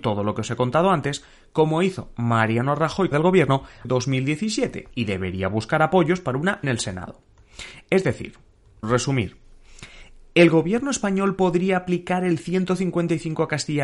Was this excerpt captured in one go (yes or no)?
no